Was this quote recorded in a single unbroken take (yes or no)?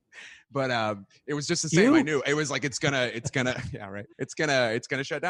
no